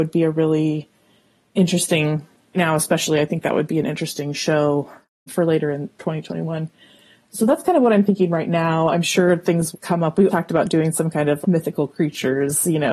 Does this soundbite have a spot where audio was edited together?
yes; 4 cuts; at 2.5 s, 9.7 s, 10.3 s, 11.4 s

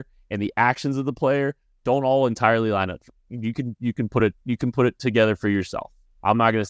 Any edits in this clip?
no; 0 cuts

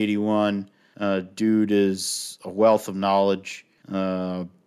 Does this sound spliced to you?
no; 0 cuts

